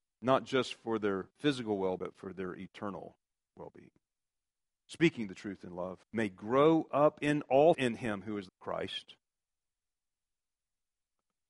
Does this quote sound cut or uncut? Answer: cut